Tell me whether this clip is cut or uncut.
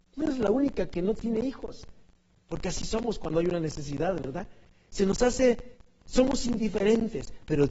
uncut